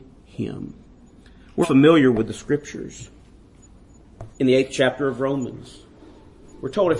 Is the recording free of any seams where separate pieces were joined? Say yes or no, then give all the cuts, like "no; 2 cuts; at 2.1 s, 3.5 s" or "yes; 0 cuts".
no; 2 cuts; at 1.6 s, 4.3 s